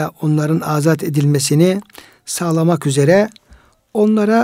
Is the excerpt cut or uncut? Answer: uncut